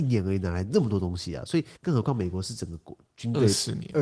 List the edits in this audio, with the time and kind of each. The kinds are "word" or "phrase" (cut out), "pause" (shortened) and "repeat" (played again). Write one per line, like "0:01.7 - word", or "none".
0:01.8 - pause